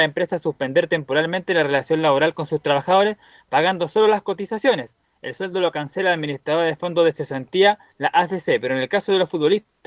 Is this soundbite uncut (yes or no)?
yes